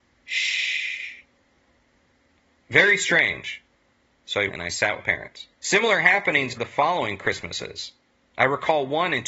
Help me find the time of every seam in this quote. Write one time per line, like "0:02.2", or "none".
0:04.5
0:05.0
0:05.5
0:06.6